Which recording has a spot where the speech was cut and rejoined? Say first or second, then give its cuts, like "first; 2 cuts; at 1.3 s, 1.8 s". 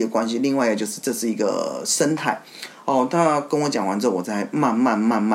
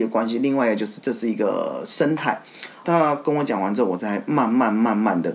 second; 1 cut; at 2.8 s